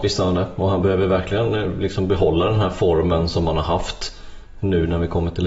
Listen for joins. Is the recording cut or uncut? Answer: uncut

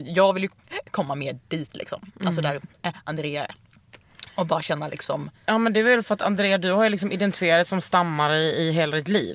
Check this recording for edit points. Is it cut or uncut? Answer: cut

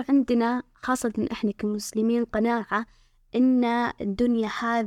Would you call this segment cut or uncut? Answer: uncut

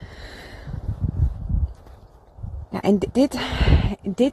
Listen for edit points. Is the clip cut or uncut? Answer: cut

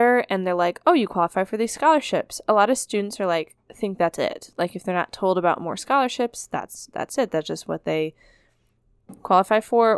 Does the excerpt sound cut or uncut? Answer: uncut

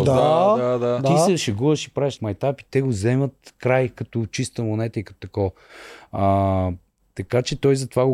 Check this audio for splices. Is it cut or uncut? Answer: cut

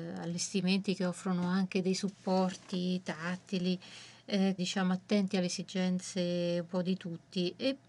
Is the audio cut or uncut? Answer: cut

